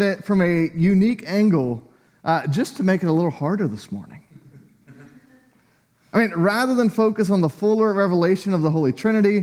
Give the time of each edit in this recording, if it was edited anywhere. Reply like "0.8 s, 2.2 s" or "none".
none